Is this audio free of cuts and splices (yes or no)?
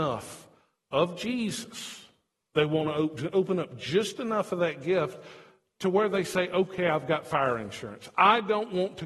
yes